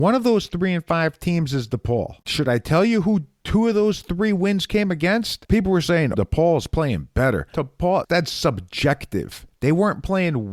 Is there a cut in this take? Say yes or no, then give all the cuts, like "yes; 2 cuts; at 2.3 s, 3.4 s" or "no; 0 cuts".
yes; 2 cuts; at 6.1 s, 8.0 s